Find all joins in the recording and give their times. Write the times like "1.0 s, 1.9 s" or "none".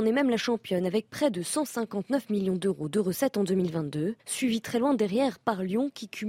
4.2 s